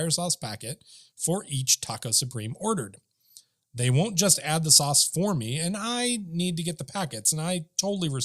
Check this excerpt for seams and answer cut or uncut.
uncut